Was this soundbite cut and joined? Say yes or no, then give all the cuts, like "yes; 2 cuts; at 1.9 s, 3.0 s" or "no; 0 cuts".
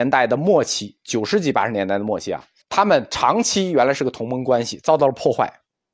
yes; 1 cut; at 2.6 s